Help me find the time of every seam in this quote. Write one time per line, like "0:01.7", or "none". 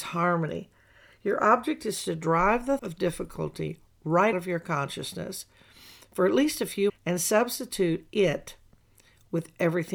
0:02.8
0:04.3
0:06.9